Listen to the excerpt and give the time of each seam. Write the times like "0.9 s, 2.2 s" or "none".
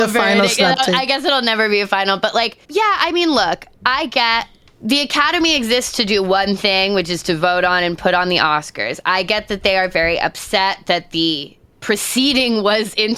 2.6 s